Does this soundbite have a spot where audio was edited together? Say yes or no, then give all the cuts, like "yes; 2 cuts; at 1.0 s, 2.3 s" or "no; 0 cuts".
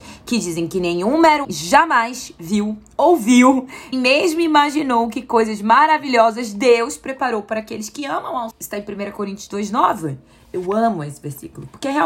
yes; 3 cuts; at 1.4 s, 3.9 s, 8.5 s